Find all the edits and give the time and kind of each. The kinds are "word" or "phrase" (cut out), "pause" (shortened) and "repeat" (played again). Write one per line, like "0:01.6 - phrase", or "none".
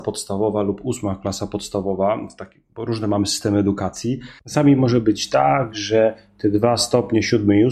none